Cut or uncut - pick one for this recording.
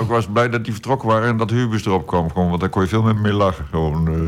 cut